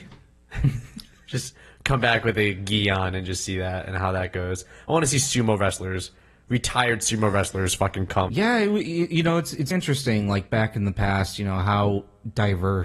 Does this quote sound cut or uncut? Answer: cut